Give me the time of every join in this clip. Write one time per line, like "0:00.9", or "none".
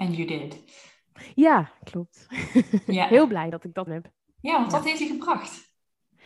0:03.5
0:03.9
0:05.0